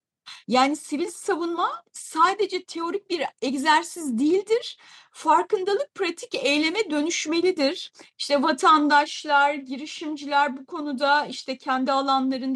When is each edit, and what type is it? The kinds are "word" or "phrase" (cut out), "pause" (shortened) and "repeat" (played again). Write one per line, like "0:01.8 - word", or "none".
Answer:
none